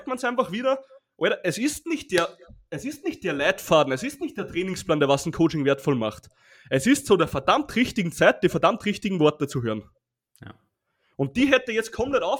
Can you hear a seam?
no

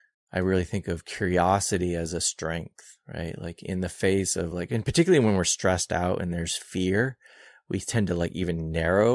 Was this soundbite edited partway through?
no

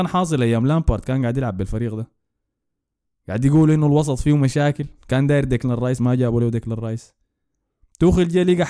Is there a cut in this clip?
no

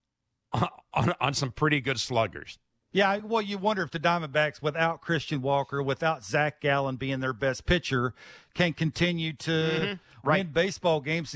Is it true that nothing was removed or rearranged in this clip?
yes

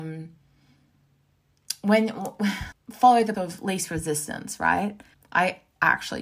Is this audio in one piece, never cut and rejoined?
no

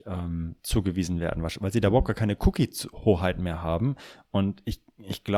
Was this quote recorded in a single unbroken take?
yes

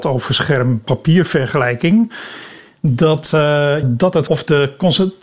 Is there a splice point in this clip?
yes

